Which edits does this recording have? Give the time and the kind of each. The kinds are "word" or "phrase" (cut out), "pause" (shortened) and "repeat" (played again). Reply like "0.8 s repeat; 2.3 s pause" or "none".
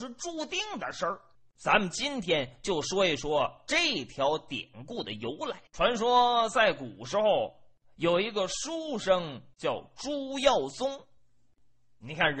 1.3 s pause; 5.7 s pause